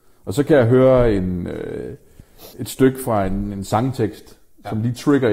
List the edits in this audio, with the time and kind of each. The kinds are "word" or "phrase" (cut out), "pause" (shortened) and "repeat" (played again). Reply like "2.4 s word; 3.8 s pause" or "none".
2.5 s pause